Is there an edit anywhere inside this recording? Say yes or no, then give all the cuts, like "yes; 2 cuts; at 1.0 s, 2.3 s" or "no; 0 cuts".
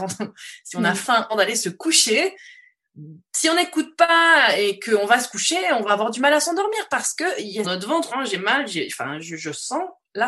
yes; 3 cuts; at 1.3 s, 7.6 s, 8.1 s